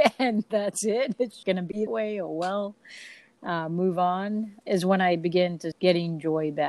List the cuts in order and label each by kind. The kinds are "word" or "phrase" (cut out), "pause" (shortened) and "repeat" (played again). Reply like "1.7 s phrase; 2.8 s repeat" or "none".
1.4 s word; 1.9 s word; 4.6 s word; 5.7 s word